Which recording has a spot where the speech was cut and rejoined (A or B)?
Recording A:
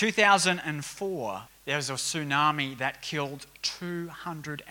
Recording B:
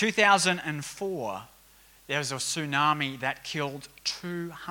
A